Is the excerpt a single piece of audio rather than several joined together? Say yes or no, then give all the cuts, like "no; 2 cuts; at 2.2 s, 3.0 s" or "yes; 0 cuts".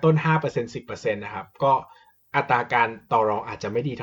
yes; 0 cuts